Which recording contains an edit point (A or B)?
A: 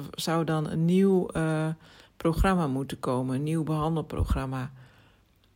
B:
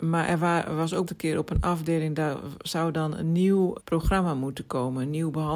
B